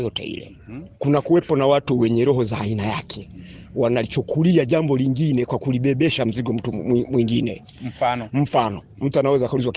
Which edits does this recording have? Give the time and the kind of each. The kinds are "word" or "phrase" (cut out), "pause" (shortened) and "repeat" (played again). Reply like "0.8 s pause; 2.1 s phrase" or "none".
0.9 s pause